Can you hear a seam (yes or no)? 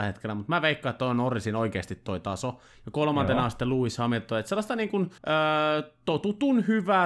yes